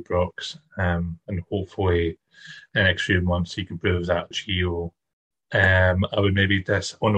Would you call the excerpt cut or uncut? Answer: cut